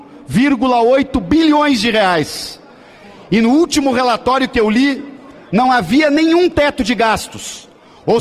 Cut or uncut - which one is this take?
uncut